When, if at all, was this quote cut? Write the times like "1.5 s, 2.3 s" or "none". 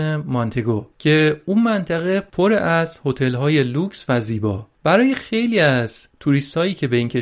0.9 s, 4.7 s